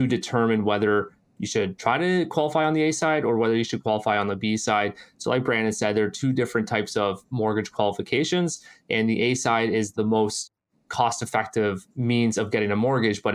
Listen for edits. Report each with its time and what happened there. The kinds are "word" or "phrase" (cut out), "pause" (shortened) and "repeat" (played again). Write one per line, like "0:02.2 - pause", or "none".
none